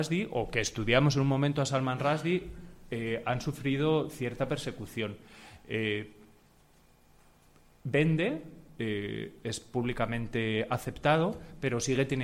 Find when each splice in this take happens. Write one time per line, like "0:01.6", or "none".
none